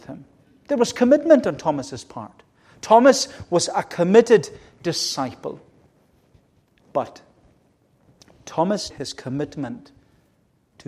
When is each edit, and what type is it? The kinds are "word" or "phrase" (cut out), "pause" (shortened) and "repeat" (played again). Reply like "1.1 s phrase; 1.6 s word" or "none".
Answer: 8.9 s word